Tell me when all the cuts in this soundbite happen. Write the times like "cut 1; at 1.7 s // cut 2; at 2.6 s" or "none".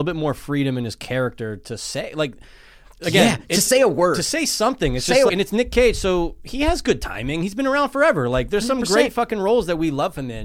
cut 1; at 5.3 s